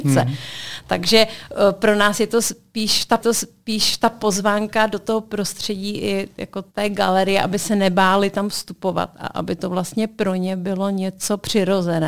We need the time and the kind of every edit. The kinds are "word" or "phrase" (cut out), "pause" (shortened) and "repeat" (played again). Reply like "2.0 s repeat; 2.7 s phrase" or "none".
3.2 s repeat; 6.7 s pause